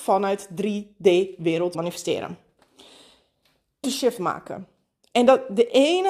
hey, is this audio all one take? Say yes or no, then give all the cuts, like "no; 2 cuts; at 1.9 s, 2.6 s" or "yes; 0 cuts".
no; 2 cuts; at 1.7 s, 3.8 s